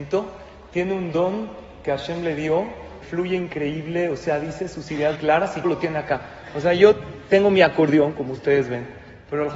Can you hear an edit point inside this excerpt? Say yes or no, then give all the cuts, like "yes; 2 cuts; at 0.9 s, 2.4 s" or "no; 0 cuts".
yes; 3 cuts; at 3.0 s, 5.1 s, 5.6 s